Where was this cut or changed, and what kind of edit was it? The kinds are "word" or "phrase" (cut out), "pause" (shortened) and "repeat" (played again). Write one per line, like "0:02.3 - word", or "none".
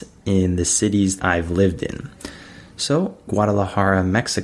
0:01.2 - word
0:03.3 - word